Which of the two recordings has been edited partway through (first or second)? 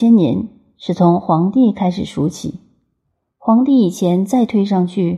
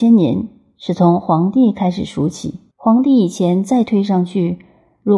second